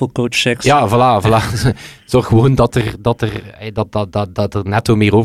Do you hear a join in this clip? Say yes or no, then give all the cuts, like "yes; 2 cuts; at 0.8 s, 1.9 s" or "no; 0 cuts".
no; 0 cuts